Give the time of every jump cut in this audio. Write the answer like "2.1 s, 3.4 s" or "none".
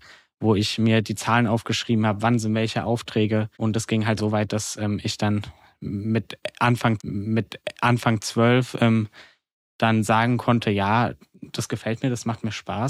3.5 s, 4.2 s, 7.0 s